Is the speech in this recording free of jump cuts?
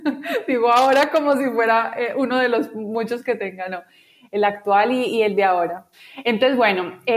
yes; 0 cuts

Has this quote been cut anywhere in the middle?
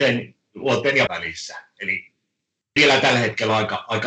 yes; 2 cuts; at 1.1 s, 2.8 s

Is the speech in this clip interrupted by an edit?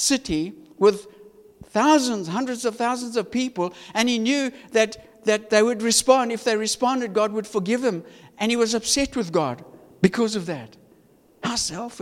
no; 0 cuts

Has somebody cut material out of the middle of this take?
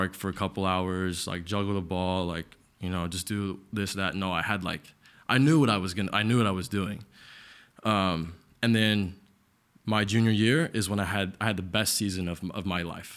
no; 0 cuts

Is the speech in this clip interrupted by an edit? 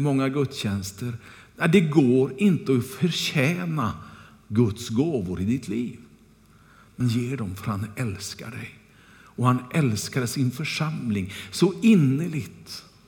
yes; 1 cut; at 7.0 s

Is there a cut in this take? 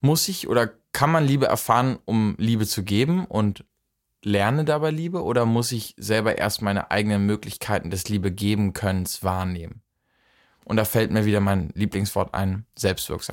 no; 0 cuts

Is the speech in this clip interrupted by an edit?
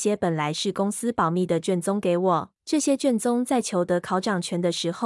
yes; 1 cut; at 2.6 s

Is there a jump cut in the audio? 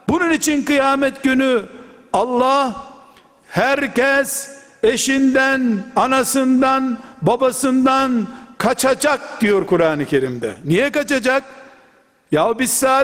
no; 0 cuts

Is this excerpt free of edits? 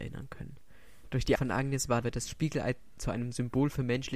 no; 2 cuts; at 1.4 s, 2.0 s

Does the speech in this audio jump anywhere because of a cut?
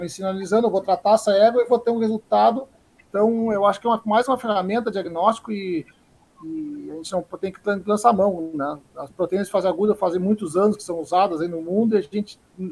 no; 0 cuts

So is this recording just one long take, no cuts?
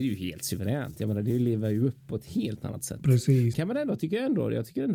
no; 1 cut; at 3.5 s

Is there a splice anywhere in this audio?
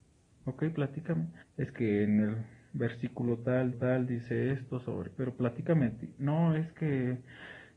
yes; 4 cuts; at 1.4 s, 1.8 s, 3.7 s, 5.2 s

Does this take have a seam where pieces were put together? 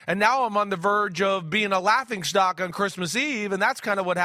no; 0 cuts

